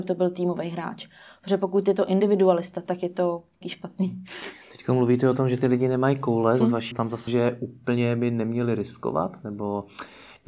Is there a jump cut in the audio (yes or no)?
yes